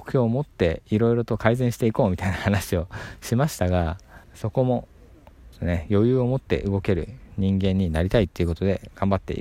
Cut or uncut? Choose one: cut